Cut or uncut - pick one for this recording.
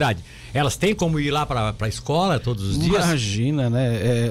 uncut